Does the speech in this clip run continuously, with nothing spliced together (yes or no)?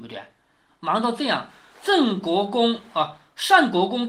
yes